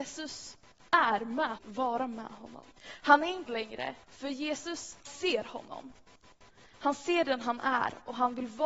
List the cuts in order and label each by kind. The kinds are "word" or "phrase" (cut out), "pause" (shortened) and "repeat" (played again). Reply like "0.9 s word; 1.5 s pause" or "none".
1.6 s phrase; 2.8 s pause; 3.5 s word; 4.0 s pause; 5.0 s word